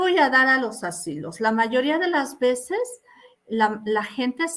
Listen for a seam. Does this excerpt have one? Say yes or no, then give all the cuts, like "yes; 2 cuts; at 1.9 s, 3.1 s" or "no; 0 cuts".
no; 0 cuts